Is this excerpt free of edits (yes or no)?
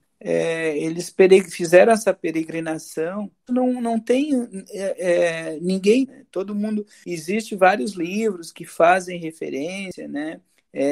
no